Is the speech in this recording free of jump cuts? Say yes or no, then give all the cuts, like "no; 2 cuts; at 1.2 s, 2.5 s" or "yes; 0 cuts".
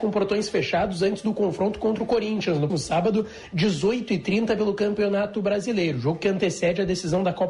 no; 1 cut; at 2.7 s